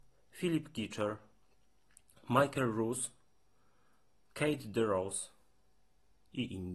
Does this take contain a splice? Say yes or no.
no